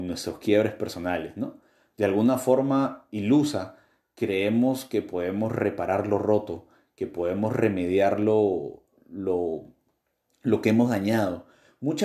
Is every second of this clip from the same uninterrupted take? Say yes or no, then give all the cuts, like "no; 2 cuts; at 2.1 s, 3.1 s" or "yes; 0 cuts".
yes; 0 cuts